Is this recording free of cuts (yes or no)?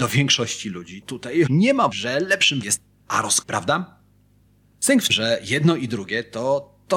no